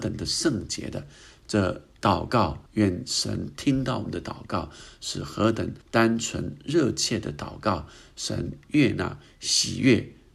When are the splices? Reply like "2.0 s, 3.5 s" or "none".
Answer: 2.7 s, 5.8 s